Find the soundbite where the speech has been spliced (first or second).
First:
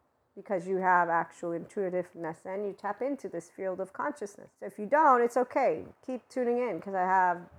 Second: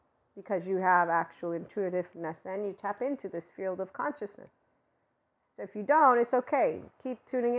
first